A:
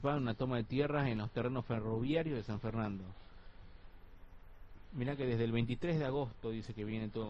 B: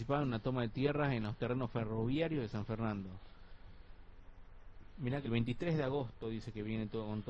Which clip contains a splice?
B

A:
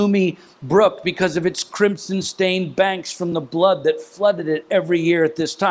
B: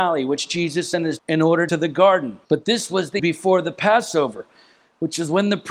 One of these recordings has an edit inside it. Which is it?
B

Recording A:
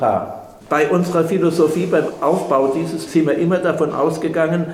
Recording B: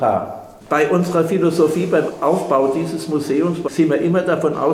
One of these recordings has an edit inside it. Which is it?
A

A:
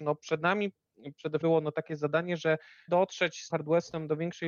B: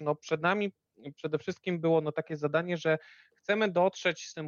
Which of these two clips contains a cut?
A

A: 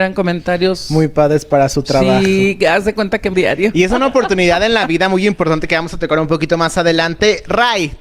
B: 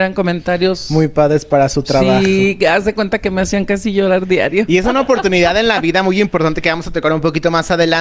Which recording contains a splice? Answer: A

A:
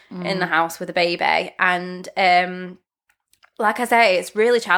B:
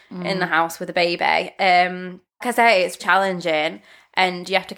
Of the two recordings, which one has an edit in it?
B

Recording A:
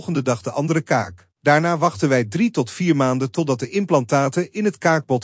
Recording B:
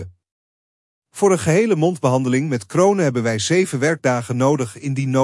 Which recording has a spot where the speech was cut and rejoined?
A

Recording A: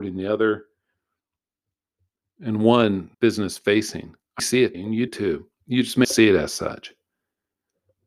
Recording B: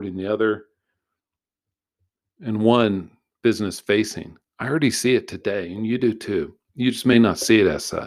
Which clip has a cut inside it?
A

